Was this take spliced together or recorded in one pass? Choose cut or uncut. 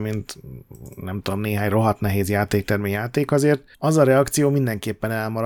cut